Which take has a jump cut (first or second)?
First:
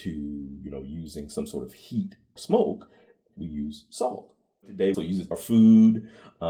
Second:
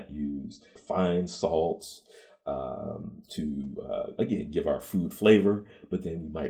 first